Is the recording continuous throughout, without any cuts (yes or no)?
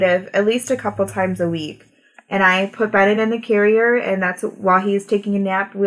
yes